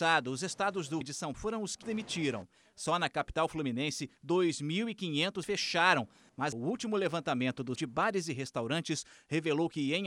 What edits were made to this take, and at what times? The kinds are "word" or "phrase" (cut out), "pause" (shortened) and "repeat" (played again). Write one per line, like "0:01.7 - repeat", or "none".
0:01.0 - word
0:01.3 - word
0:01.8 - word
0:05.4 - word
0:06.5 - word
0:07.8 - word